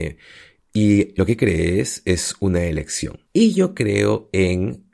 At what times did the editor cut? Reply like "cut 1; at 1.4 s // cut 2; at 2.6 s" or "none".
cut 1; at 1.2 s // cut 2; at 3.3 s